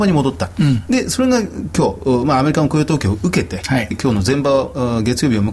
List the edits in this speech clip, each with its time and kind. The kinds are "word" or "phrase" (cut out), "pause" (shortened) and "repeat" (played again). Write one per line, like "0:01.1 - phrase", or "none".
0:03.9 - word